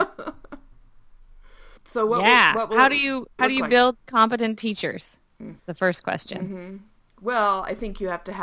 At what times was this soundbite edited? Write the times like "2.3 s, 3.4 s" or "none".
1.8 s, 3.4 s, 5.6 s